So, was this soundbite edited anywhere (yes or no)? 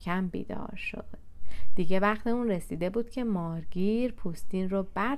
no